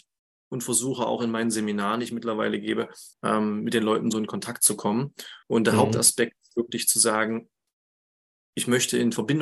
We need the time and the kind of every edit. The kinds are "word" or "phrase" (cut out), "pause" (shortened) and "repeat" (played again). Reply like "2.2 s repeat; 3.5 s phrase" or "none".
3.1 s pause; 5.4 s pause